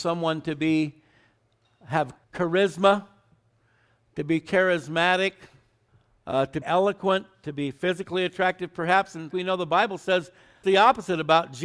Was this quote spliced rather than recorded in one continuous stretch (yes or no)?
yes